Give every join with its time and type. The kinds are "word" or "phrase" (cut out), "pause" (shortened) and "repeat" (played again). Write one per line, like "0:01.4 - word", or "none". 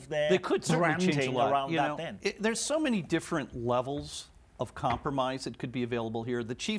none